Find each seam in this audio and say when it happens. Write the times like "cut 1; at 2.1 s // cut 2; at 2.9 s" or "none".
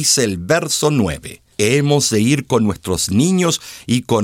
cut 1; at 1.5 s